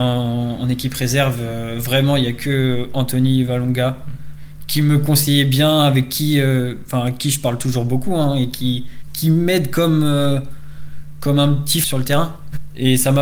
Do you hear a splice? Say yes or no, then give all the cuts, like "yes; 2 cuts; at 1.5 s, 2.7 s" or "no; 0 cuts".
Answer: yes; 1 cut; at 11.8 s